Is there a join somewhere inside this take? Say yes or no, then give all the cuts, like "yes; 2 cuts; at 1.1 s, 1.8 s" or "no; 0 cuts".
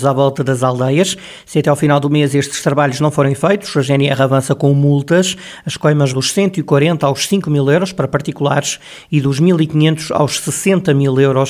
yes; 1 cut; at 6.1 s